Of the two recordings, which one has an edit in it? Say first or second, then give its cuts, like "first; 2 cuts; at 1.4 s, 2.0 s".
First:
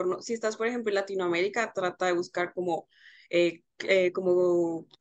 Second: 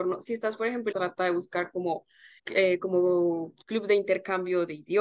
second; 2 cuts; at 0.9 s, 2.4 s